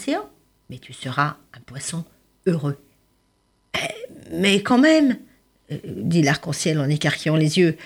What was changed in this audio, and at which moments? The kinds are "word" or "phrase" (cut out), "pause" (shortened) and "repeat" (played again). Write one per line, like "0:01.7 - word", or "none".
none